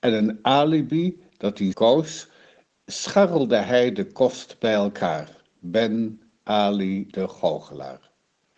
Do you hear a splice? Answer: yes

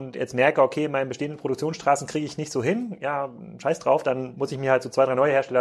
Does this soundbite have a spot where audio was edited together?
no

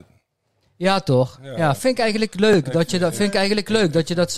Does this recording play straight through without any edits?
no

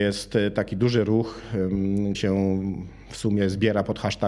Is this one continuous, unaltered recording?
no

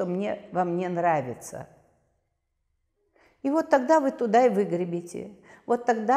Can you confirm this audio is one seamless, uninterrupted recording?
yes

